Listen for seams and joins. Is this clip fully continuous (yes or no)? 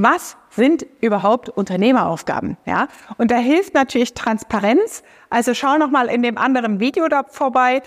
yes